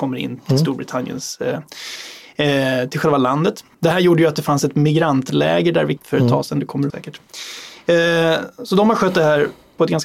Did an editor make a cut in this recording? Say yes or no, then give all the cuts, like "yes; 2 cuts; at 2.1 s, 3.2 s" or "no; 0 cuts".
yes; 3 cuts; at 3.7 s, 6.0 s, 6.9 s